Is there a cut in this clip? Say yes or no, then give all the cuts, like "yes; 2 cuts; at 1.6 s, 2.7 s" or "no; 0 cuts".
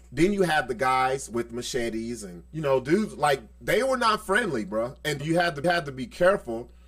yes; 4 cuts; at 2.5 s, 3.5 s, 5.2 s, 5.6 s